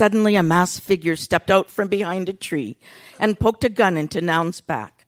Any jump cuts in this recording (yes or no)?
no